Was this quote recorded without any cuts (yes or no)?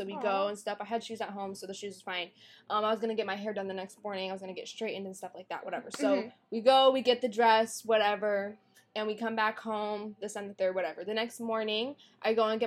yes